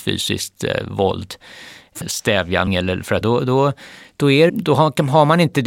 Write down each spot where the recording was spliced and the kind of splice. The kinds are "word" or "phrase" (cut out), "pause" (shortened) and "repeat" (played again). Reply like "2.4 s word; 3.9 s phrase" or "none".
2.0 s word; 2.7 s word; 3.2 s word; 4.5 s phrase